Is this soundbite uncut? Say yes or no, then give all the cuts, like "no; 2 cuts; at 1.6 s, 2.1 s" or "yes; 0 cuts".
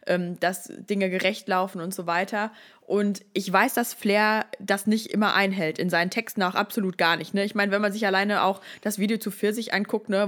yes; 0 cuts